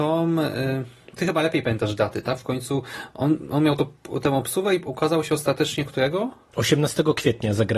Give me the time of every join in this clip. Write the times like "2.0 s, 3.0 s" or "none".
none